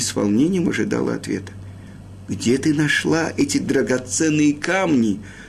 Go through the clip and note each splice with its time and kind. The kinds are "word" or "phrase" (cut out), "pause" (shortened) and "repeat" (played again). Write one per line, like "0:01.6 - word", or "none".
none